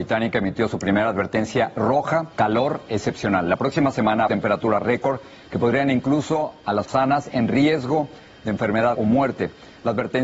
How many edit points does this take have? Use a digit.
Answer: 4